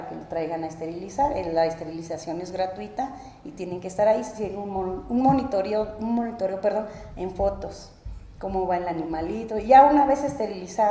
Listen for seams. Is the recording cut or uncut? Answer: uncut